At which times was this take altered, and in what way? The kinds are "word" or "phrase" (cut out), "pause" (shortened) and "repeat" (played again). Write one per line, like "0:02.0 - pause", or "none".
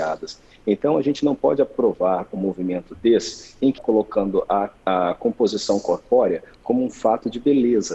0:03.8 - word
0:04.8 - pause